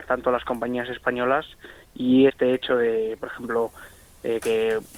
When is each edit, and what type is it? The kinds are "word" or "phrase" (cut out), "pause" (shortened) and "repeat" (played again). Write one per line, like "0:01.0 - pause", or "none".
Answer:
0:02.3 - word